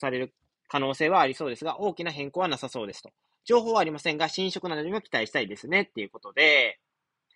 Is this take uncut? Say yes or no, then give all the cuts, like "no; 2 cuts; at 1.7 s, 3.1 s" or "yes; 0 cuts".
yes; 0 cuts